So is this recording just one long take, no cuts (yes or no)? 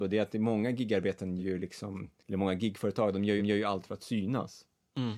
no